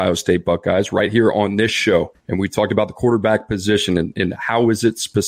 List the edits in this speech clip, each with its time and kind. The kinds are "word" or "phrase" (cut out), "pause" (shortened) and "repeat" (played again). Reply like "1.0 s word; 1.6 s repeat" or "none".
none